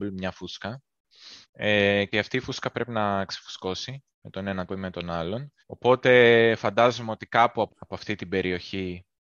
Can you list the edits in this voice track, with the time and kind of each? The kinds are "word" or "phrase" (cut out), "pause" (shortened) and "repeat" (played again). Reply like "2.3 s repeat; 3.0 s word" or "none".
1.4 s pause; 2.1 s word; 4.1 s pause; 4.7 s word; 5.6 s pause; 7.7 s word